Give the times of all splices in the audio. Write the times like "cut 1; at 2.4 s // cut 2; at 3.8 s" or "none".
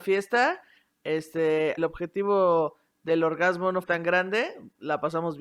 cut 1; at 1.8 s // cut 2; at 3.8 s

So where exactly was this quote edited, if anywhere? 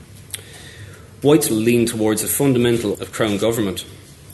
cut 1; at 1.5 s // cut 2; at 2.9 s

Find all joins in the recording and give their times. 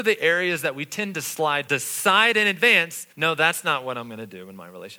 cut 1; at 1.7 s // cut 2; at 3.1 s

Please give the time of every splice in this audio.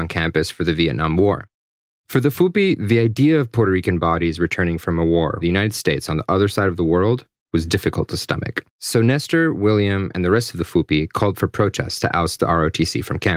cut 1; at 5.4 s // cut 2; at 8.7 s

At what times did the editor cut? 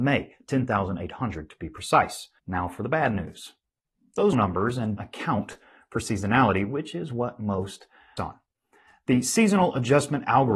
cut 1; at 2.4 s // cut 2; at 4.3 s // cut 3; at 5.0 s // cut 4; at 8.2 s

